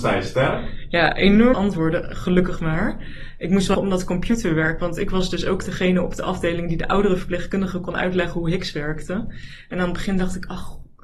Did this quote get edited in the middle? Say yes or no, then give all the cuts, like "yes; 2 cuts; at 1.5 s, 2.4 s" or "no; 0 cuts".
yes; 2 cuts; at 1.5 s, 3.7 s